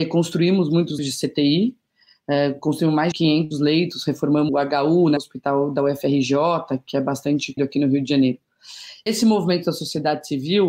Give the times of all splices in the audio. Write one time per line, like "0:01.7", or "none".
0:01.0
0:03.1
0:04.5
0:05.2
0:07.6
0:09.1